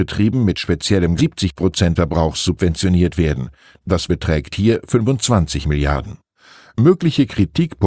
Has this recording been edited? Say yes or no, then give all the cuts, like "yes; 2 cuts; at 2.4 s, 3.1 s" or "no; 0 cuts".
yes; 3 cuts; at 1.2 s, 2.0 s, 4.1 s